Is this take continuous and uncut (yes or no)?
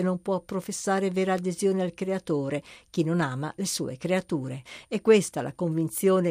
yes